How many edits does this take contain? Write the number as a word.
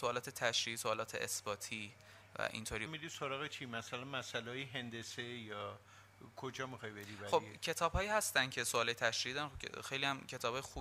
one